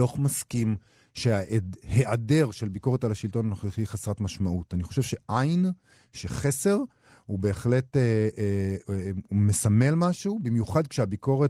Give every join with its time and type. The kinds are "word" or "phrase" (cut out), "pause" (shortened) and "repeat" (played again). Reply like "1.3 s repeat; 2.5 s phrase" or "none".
none